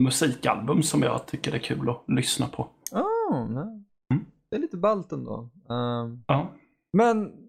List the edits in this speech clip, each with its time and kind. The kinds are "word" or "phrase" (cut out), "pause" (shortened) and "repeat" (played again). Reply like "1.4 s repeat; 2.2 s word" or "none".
none